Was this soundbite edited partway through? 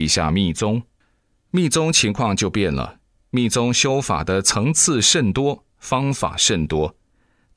no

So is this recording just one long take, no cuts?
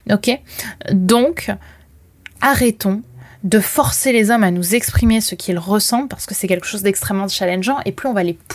yes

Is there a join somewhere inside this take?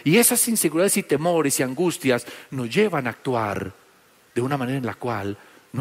no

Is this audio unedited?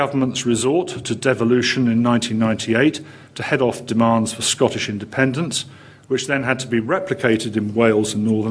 yes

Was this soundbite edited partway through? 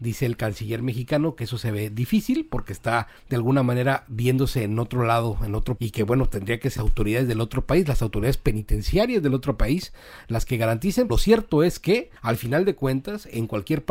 yes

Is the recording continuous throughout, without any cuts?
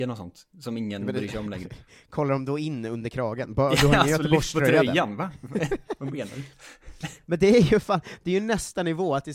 yes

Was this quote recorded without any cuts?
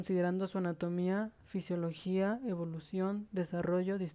yes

